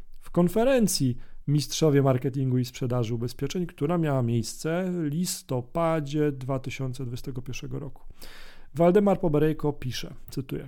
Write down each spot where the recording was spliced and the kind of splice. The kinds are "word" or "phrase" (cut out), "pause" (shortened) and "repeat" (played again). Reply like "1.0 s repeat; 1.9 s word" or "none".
none